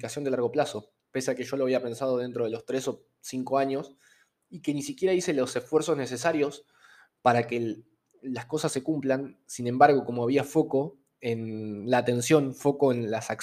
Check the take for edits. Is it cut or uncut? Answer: uncut